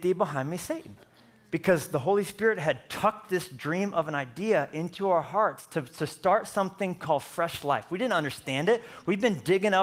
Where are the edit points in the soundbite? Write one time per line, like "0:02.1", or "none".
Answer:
none

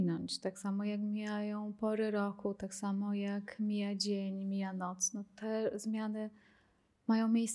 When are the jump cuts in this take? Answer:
none

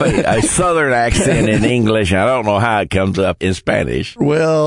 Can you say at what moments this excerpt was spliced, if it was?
none

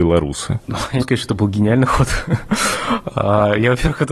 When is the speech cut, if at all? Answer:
0:01.0

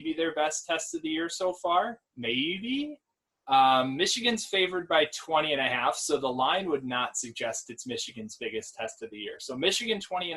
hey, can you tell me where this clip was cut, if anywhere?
0:02.1

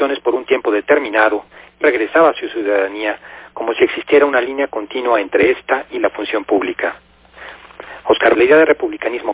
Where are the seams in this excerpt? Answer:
0:01.8
0:08.3

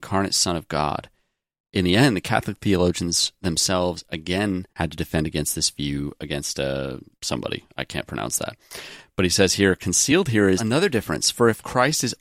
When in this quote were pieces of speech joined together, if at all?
0:04.7
0:07.2
0:10.6

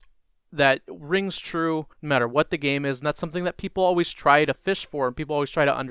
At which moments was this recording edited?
0:01.9

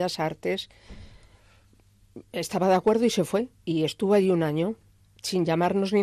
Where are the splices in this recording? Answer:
0:03.6

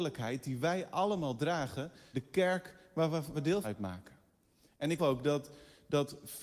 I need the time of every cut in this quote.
0:02.1
0:03.3
0:03.6
0:05.0

